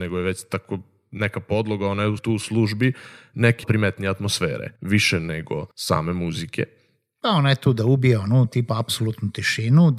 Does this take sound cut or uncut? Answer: cut